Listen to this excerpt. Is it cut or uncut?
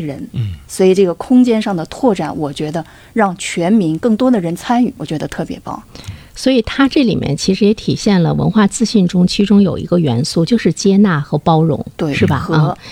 uncut